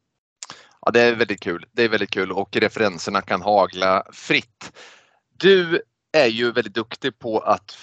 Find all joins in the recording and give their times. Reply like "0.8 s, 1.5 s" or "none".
none

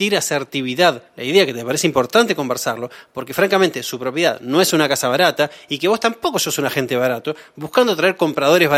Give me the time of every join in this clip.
1.1 s

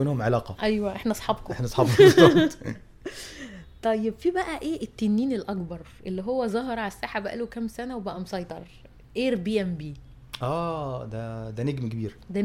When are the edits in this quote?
none

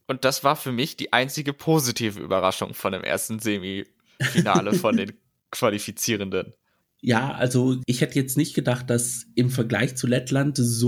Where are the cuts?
none

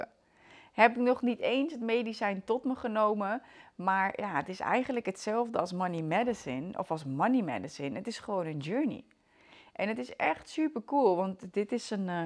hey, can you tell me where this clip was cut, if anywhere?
none

